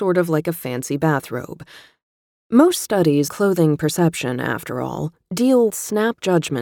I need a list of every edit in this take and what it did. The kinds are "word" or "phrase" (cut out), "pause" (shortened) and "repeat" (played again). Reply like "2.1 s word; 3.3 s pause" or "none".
3.3 s word; 5.7 s word